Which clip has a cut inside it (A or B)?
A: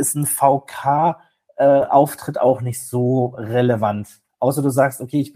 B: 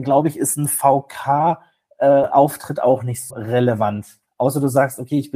B